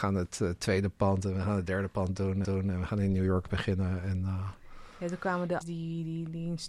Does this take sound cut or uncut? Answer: cut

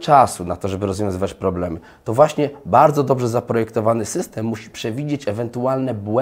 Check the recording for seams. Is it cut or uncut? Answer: uncut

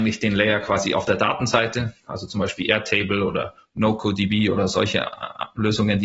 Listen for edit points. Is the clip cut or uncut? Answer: uncut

